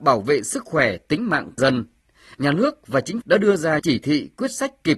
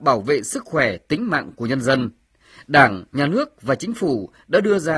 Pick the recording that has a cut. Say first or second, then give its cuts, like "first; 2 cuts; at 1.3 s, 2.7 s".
first; 4 cuts; at 1.6 s, 2.3 s, 3.2 s, 3.8 s